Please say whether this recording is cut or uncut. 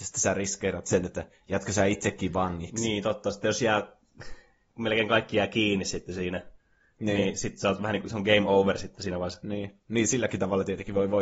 uncut